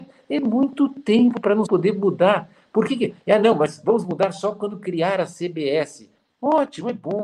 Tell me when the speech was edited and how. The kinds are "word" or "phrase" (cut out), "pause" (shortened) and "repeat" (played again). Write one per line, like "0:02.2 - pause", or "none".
0:01.7 - word